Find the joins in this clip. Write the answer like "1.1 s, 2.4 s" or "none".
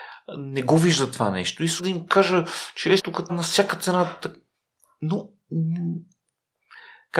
1.8 s, 3.0 s, 3.3 s